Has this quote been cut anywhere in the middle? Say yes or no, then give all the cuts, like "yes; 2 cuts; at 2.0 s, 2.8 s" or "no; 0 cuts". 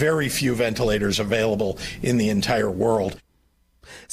no; 0 cuts